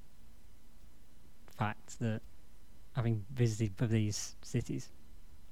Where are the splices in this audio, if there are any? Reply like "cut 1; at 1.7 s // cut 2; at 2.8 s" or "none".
cut 1; at 3.8 s